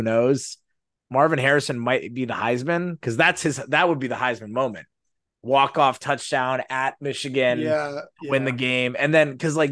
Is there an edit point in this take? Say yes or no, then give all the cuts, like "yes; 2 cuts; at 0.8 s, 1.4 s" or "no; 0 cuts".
no; 0 cuts